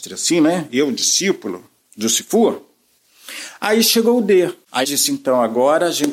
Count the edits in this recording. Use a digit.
1